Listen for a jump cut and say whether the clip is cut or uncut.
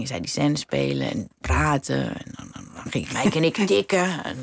cut